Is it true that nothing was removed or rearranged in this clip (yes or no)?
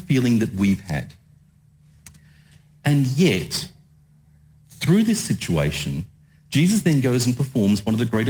yes